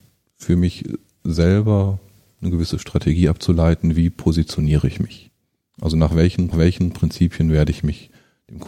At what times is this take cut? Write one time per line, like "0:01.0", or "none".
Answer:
0:06.5